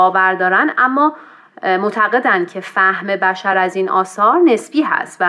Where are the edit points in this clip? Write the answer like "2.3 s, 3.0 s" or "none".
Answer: none

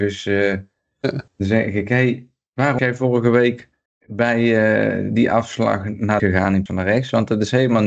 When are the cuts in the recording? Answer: 1.3 s, 2.8 s, 6.2 s, 6.7 s

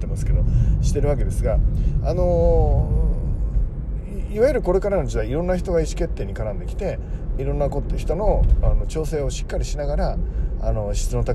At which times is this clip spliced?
7.4 s

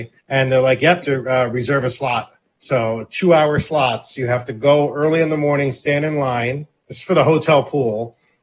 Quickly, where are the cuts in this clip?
1.0 s

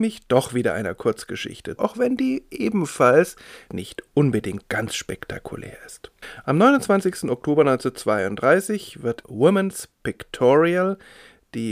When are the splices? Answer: 1.8 s, 3.7 s, 4.6 s, 9.2 s

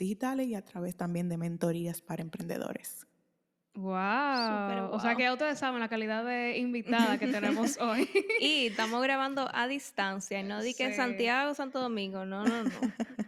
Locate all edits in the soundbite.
none

